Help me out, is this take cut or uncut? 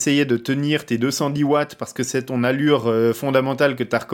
uncut